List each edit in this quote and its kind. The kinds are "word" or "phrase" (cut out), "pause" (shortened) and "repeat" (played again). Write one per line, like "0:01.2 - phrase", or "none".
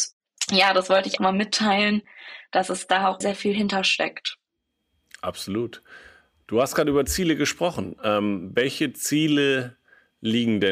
0:01.2 - word
0:03.2 - word